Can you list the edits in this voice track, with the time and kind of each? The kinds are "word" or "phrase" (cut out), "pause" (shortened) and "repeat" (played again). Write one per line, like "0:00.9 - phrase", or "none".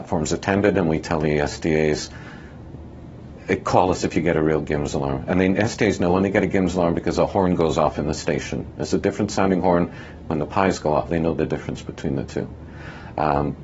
0:11.1 - word